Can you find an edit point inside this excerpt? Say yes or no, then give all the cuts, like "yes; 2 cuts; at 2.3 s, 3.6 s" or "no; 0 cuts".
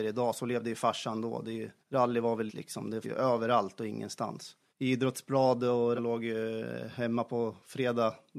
yes; 5 cuts; at 1.8 s, 2.5 s, 3.0 s, 4.7 s, 6.0 s